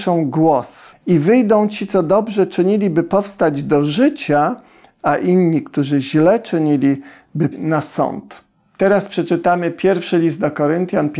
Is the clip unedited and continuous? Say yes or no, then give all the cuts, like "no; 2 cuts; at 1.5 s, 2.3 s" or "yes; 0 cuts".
no; 2 cuts; at 0.9 s, 7.5 s